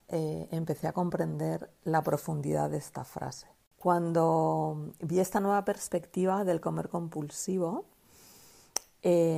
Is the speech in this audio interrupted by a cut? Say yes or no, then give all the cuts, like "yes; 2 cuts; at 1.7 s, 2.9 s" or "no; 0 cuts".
no; 0 cuts